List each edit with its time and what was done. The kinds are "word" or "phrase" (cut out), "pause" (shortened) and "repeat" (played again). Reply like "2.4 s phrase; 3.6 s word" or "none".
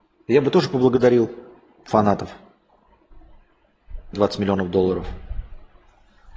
4.1 s phrase